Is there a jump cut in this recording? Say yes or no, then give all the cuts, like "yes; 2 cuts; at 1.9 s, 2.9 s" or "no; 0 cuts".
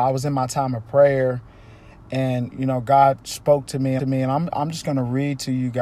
yes; 3 cuts; at 2.5 s, 3.2 s, 4.0 s